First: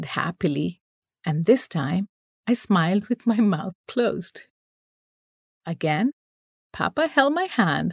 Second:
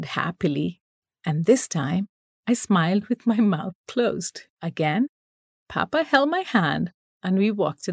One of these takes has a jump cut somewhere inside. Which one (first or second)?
second